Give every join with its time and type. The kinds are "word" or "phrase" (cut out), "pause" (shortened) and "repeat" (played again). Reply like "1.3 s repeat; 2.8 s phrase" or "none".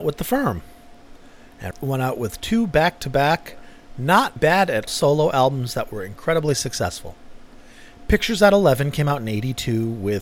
1.7 s word; 4.4 s word; 4.9 s word